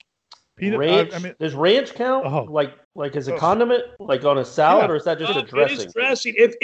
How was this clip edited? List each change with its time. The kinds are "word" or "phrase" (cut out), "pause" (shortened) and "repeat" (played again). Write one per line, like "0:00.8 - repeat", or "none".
0:02.8 - pause
0:04.0 - pause